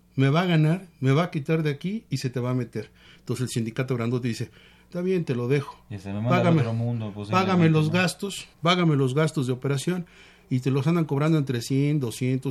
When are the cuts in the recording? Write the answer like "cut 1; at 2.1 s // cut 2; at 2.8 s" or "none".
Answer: cut 1; at 8.5 s